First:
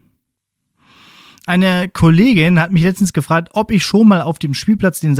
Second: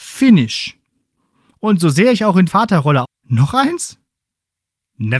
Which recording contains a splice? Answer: second; 2 cuts; at 2.5 s, 3.0 s

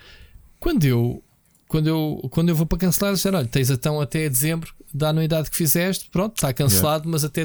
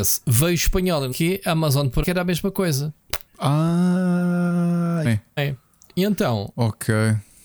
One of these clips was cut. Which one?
second; 5 cuts; at 1.1 s, 2.0 s, 3.3 s, 5.0 s, 5.4 s

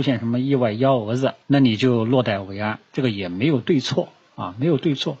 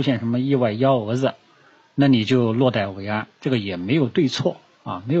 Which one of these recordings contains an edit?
first; 1 cut; at 1.4 s

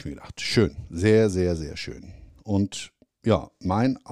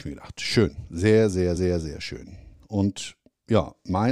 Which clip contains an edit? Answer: second; 1 cut; at 1.6 s

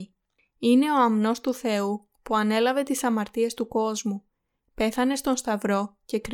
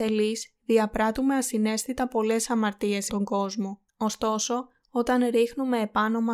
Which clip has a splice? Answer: second; 2 cuts; at 3.1 s, 3.9 s

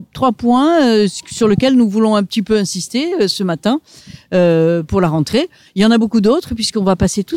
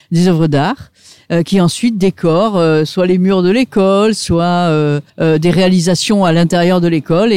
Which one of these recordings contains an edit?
second; 1 cut; at 5.1 s

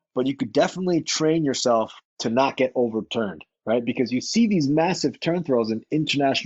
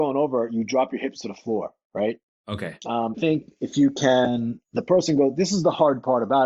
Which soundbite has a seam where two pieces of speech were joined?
second; 2 cuts; at 3.1 s, 4.6 s

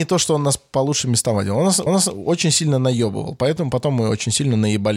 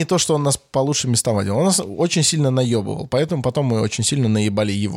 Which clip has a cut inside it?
first; 1 cut; at 1.9 s

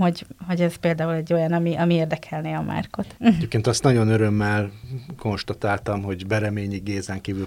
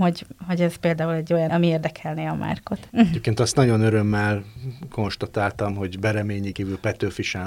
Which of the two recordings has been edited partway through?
second; 2 cuts; at 1.5 s, 6.5 s

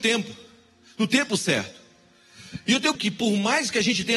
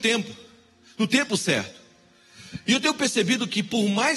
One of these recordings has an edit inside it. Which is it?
first; 1 cut; at 2.9 s

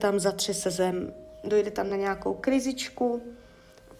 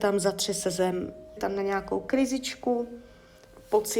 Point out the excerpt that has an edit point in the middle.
second; 1 cut; at 1.4 s

